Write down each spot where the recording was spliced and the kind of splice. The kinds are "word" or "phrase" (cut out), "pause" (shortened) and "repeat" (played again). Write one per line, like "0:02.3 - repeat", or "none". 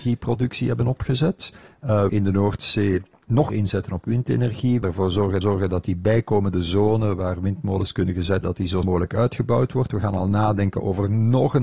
0:02.1 - phrase
0:03.5 - word
0:04.8 - word
0:05.4 - repeat
0:08.4 - word
0:08.8 - word